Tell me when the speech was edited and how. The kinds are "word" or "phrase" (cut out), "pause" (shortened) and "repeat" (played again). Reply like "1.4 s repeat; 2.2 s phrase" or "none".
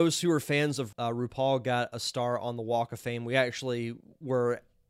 0.9 s word